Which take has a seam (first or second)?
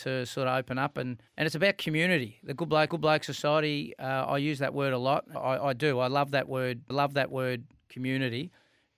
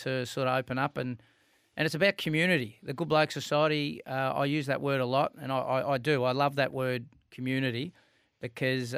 first